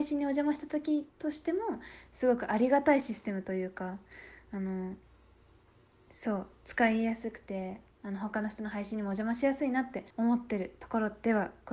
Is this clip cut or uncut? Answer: cut